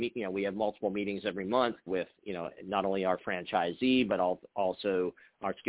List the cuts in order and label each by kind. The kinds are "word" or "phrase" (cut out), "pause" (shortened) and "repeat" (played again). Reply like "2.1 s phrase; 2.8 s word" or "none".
1.9 s word